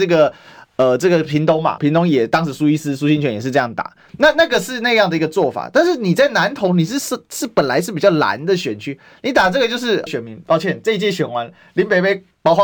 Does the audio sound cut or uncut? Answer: cut